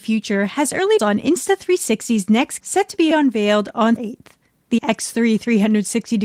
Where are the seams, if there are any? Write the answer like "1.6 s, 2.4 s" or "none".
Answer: 1.0 s, 2.6 s, 3.1 s, 4.0 s, 4.8 s